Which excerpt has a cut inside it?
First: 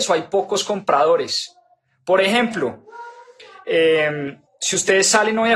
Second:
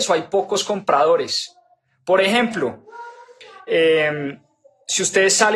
first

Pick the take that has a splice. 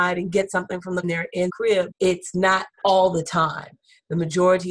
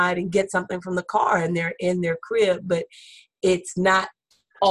first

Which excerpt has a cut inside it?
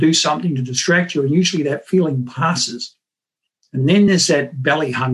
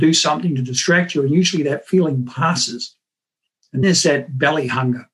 second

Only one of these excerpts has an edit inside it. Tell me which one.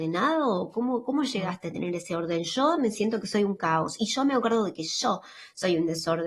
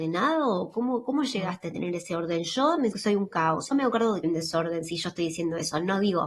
second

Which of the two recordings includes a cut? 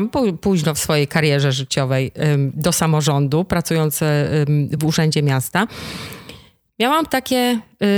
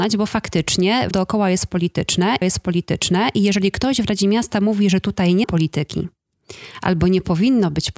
second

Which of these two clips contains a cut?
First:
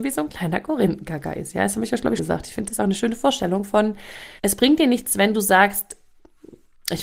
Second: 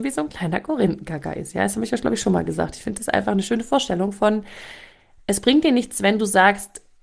first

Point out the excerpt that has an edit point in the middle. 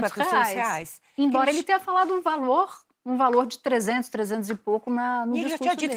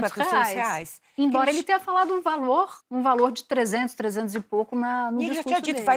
second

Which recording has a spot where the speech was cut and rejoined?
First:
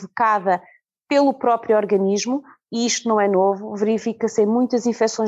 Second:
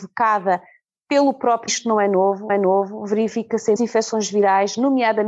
second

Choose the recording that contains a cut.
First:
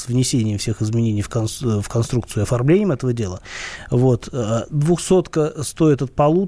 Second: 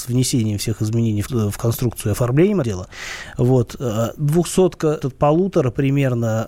second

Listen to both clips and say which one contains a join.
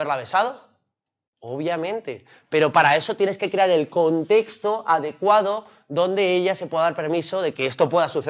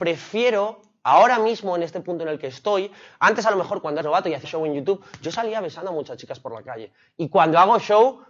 second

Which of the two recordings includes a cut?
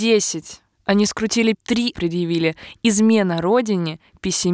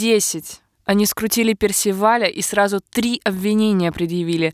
first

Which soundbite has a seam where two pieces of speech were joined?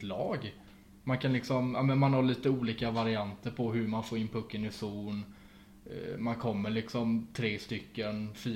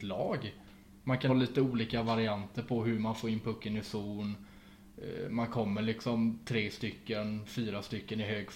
second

